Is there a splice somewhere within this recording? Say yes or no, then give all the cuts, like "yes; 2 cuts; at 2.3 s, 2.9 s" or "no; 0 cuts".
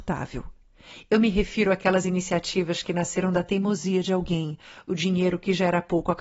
no; 0 cuts